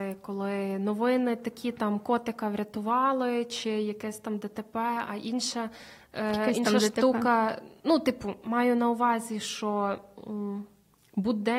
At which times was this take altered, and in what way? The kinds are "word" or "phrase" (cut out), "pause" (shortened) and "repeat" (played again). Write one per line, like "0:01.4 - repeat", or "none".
none